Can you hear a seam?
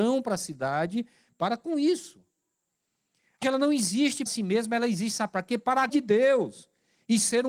yes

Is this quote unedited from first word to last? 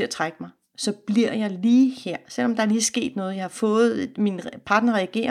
yes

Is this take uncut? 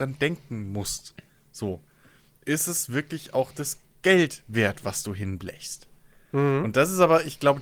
yes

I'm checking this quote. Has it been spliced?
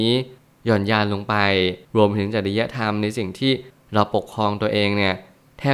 yes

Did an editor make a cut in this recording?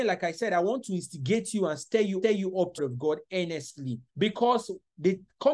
yes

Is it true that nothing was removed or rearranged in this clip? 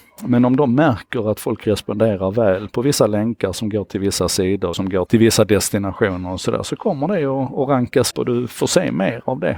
no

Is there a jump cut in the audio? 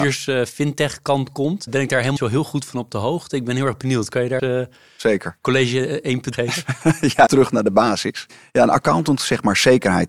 yes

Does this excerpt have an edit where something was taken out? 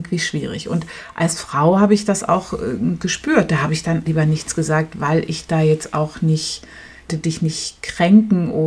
yes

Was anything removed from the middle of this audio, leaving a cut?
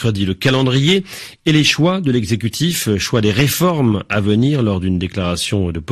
no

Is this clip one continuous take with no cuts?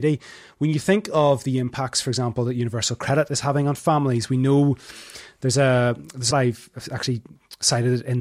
no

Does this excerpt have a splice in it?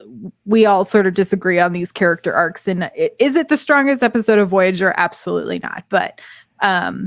no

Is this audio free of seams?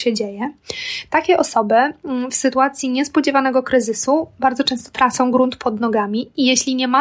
yes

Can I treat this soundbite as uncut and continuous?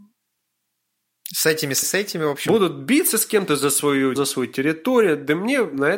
no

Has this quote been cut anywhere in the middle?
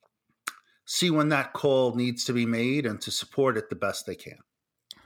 no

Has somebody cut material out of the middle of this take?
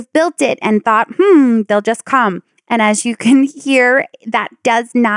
no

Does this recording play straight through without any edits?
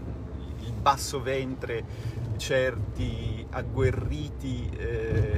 no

